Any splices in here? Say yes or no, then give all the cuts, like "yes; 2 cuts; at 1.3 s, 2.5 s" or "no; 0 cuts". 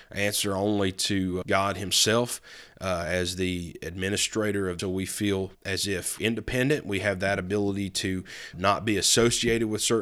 yes; 5 cuts; at 1.4 s, 4.8 s, 5.5 s, 6.2 s, 8.5 s